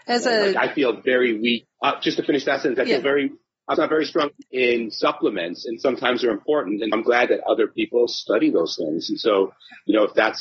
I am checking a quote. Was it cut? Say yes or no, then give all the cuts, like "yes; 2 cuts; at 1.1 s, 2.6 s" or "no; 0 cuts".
yes; 4 cuts; at 1.7 s, 3.8 s, 4.5 s, 6.9 s